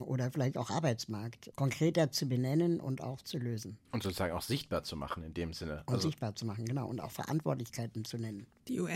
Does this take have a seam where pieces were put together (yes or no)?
yes